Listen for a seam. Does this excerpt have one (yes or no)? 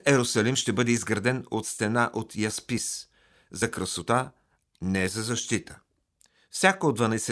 no